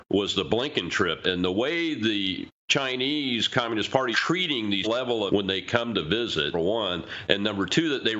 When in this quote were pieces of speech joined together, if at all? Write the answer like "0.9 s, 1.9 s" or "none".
1.2 s, 4.1 s, 4.8 s, 5.3 s, 6.5 s